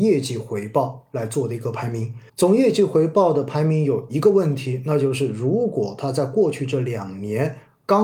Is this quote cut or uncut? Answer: cut